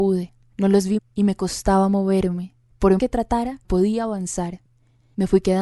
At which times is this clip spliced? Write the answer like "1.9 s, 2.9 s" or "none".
1.0 s, 3.0 s, 3.6 s